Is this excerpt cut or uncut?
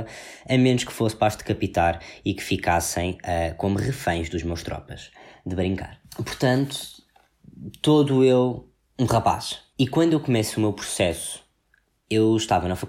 uncut